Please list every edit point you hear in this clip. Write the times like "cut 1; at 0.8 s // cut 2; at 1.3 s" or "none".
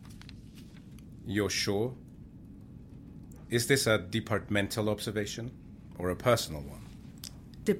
none